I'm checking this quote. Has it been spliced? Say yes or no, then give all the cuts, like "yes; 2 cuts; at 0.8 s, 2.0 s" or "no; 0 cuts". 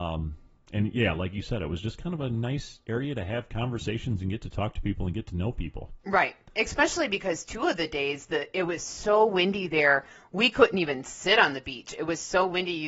no; 0 cuts